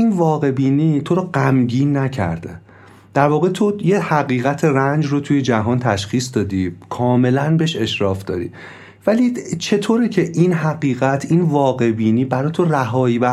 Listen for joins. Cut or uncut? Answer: uncut